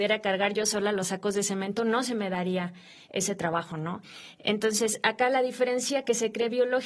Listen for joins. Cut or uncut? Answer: uncut